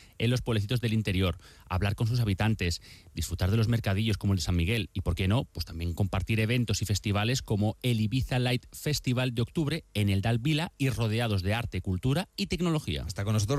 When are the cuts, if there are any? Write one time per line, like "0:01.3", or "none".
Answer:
none